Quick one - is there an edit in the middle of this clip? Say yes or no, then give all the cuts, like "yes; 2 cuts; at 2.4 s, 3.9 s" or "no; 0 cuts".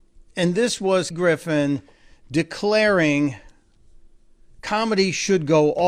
yes; 1 cut; at 1.1 s